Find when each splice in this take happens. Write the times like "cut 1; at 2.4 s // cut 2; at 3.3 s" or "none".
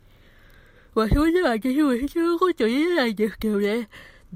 none